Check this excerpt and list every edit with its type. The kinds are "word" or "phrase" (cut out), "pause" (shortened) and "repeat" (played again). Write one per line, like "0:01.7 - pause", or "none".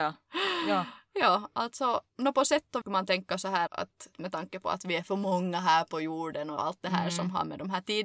0:02.1 - pause
0:02.8 - phrase
0:03.7 - word
0:04.1 - word